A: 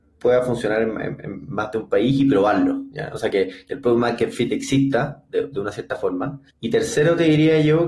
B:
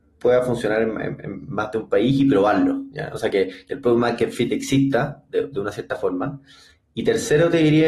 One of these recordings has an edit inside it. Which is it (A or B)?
A